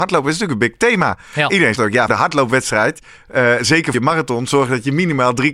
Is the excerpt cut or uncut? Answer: cut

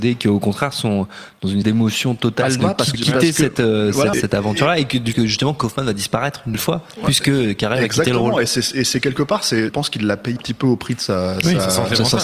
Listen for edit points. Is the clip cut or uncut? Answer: cut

